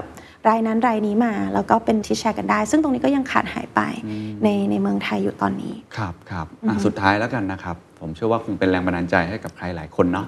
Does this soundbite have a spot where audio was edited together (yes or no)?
yes